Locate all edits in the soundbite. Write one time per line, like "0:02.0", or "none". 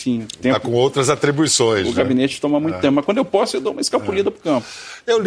none